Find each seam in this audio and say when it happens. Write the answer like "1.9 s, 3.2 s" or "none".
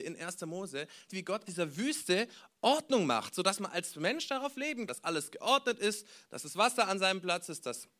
1.1 s, 1.5 s, 4.9 s